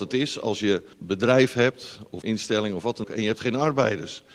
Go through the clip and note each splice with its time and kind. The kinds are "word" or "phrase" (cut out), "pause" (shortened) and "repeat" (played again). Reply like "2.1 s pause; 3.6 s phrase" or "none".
0.9 s word; 2.2 s word; 3.0 s word